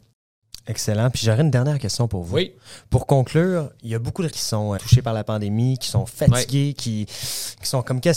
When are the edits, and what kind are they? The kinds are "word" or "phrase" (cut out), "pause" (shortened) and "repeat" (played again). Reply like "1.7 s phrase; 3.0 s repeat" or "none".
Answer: 4.3 s phrase; 4.8 s phrase